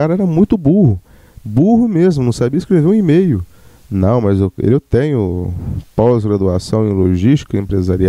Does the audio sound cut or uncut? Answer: uncut